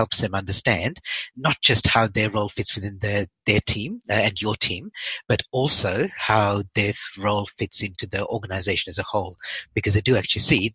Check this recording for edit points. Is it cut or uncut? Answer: uncut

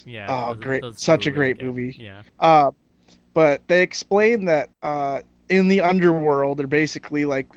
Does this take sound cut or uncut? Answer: cut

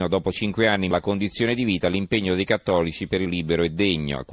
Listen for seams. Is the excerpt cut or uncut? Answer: cut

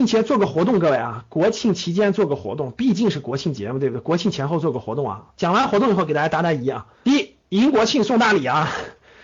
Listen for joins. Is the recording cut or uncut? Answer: cut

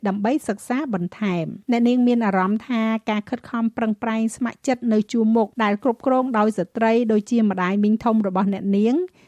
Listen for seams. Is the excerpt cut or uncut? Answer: cut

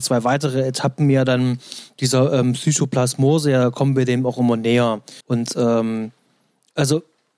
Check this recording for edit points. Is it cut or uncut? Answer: cut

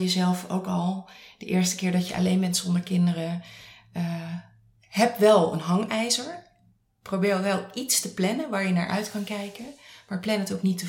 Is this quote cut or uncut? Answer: uncut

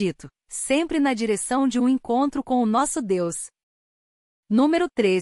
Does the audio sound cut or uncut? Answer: uncut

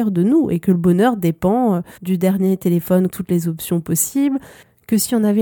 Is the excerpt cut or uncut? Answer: cut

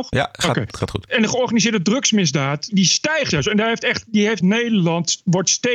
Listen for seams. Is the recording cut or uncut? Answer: cut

